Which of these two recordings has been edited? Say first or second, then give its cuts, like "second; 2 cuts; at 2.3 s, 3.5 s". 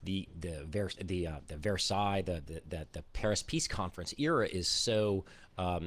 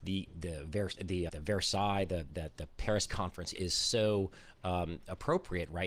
second; 4 cuts; at 1.3 s, 2.3 s, 3.1 s, 3.6 s